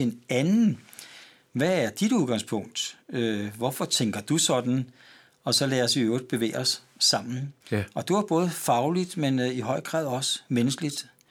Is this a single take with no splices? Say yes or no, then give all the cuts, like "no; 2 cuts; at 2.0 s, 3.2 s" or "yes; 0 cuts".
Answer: no; 1 cut; at 7.6 s